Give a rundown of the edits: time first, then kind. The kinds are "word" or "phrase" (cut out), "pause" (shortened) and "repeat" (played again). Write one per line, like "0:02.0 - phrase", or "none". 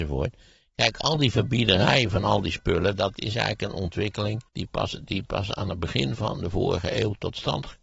0:04.5 - pause

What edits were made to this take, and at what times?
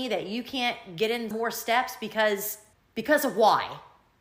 0:01.3 - word
0:02.7 - pause

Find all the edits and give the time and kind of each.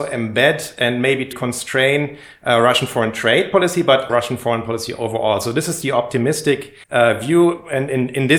0:01.3 - phrase
0:04.1 - word
0:06.8 - pause

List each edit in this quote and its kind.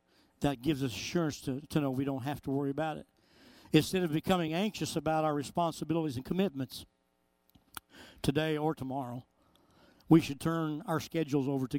none

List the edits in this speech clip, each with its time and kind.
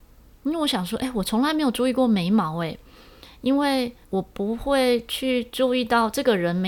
0:04.0 - pause

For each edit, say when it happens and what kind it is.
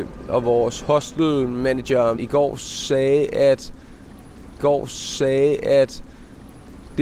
0:02.2 - word
0:04.6 - repeat

